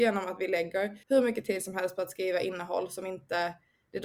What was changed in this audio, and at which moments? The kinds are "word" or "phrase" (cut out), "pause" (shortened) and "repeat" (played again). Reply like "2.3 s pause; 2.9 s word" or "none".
1.0 s pause